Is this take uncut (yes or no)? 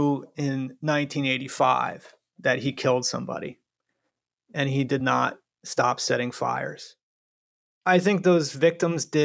yes